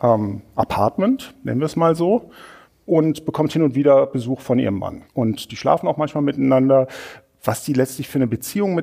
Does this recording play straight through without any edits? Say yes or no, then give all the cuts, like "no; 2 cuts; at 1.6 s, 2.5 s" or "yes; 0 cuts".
no; 2 cuts; at 2.6 s, 5.1 s